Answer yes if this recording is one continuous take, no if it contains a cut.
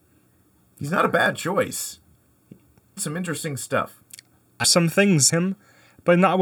no